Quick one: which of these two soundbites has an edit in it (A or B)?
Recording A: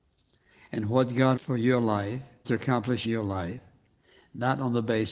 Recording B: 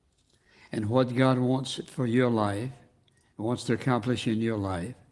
A